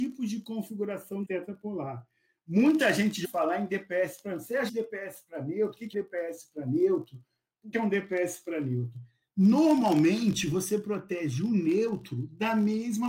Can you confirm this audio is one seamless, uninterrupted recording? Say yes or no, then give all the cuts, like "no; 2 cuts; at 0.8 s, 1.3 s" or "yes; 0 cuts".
no; 5 cuts; at 1.2 s, 3.2 s, 4.7 s, 5.9 s, 7.7 s